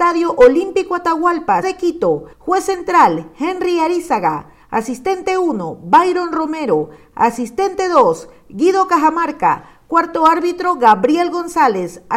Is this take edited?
yes; 2 cuts; at 1.6 s, 2.3 s

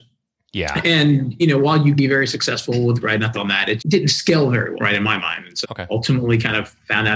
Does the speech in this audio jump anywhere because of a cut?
yes; 7 cuts; at 1.4 s, 2.0 s, 3.0 s, 3.3 s, 3.8 s, 4.8 s, 5.6 s

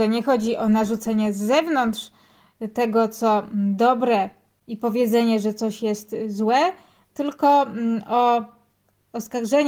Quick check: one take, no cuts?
yes; 0 cuts

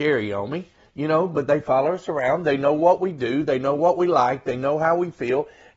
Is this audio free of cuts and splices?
yes; 0 cuts

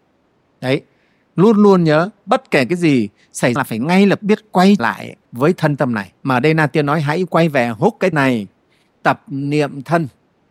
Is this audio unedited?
no; 7 cuts; at 3.6 s, 4.2 s, 4.8 s, 5.2 s, 6.2 s, 8.1 s, 9.0 s

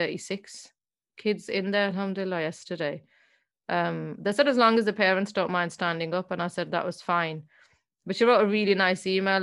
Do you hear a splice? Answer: no; 0 cuts

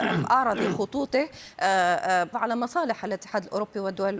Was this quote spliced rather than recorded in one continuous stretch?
yes; 1 cut; at 2.3 s

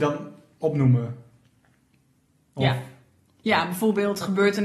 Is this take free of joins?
yes; 0 cuts

